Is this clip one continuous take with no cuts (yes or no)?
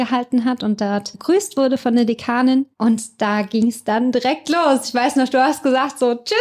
yes